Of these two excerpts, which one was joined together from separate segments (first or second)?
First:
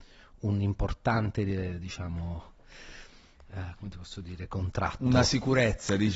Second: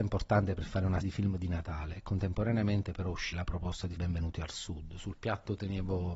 second